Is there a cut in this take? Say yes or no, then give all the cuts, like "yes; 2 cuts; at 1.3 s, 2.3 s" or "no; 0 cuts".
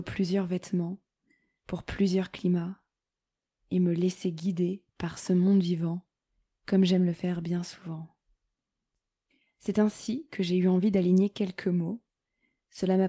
no; 0 cuts